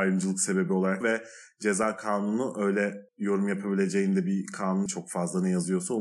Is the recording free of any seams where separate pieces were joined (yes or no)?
no